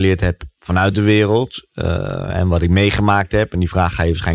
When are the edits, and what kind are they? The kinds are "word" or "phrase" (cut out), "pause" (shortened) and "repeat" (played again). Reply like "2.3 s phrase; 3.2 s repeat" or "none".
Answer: none